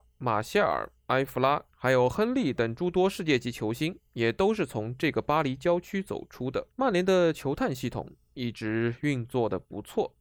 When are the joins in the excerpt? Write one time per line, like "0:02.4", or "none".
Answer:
0:01.7
0:06.7